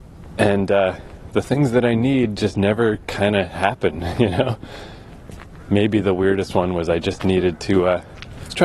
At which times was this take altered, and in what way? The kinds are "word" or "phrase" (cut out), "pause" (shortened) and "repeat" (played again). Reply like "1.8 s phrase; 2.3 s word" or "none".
none